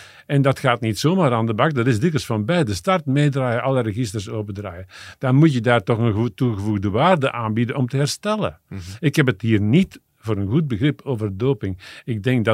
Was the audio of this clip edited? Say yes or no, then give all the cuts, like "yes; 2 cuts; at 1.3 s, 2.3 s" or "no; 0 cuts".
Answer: no; 0 cuts